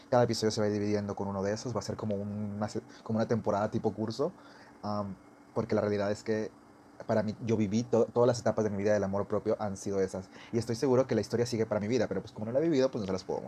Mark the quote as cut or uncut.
uncut